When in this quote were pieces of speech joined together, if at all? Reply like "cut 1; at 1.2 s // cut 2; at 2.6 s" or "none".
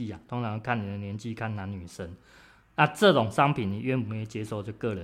none